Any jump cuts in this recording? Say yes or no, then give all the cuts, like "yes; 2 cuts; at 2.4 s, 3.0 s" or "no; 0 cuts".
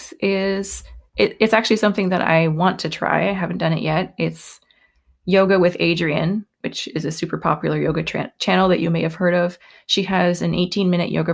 no; 0 cuts